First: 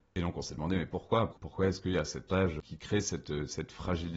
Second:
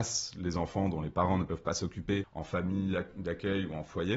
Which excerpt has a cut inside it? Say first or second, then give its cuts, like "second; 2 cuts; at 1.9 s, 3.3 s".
first; 1 cut; at 2.3 s